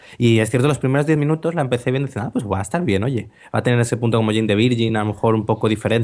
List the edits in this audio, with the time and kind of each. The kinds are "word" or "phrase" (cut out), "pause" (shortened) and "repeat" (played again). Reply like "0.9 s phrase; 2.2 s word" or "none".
none